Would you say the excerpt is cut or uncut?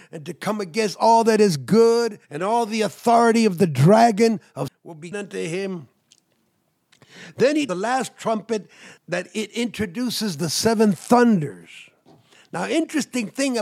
cut